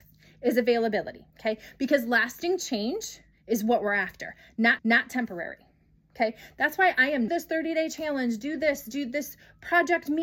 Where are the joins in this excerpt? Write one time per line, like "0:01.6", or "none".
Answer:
0:01.3
0:03.3
0:04.8
0:07.3